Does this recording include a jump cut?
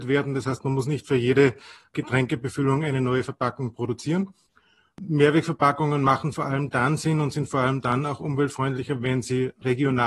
no; 0 cuts

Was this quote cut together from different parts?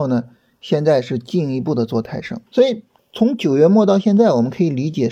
yes; 2 cuts; at 2.5 s, 3.0 s

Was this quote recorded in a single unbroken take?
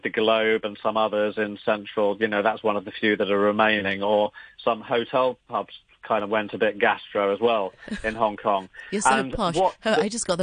yes; 0 cuts

